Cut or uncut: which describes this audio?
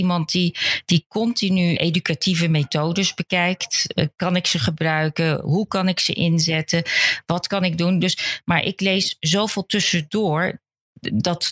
cut